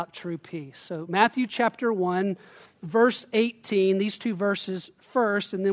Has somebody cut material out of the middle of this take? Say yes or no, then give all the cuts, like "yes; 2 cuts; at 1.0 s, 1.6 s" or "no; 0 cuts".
no; 0 cuts